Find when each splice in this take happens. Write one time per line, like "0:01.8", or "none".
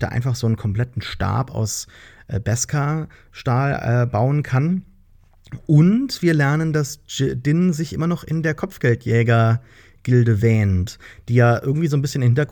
none